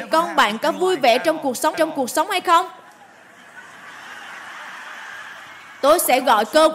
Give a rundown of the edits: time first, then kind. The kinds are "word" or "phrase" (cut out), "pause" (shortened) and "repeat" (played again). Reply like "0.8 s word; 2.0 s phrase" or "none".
1.7 s repeat